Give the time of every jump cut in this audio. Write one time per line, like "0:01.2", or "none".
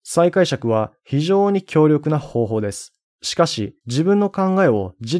0:03.1
0:03.8